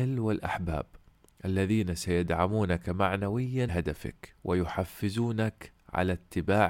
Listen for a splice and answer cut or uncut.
cut